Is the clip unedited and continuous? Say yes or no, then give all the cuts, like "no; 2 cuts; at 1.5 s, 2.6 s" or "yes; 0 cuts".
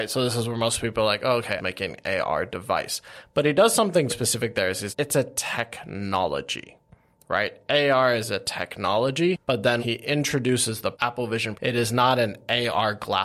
no; 6 cuts; at 1.6 s, 4.1 s, 4.9 s, 9.8 s, 10.9 s, 11.5 s